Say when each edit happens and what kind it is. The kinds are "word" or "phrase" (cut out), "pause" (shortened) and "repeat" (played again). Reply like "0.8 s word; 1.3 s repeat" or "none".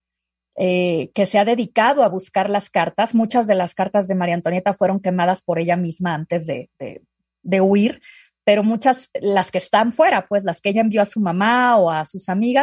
none